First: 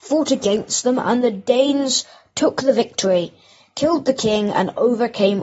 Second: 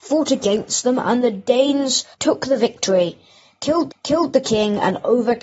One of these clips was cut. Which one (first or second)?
second